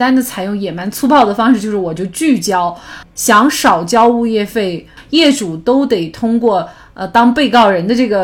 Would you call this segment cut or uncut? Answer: uncut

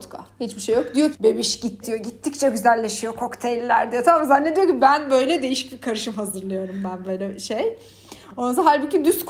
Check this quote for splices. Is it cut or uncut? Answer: cut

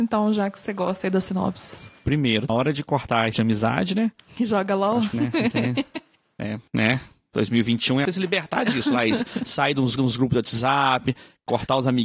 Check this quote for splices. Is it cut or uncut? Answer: cut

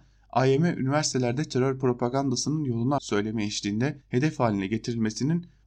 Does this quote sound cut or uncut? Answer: cut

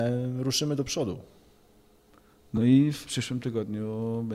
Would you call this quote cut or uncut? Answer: uncut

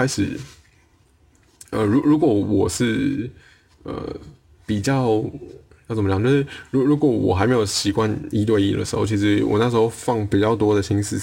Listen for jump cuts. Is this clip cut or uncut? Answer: uncut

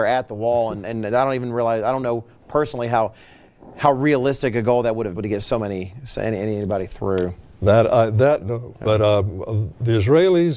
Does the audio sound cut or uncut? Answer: cut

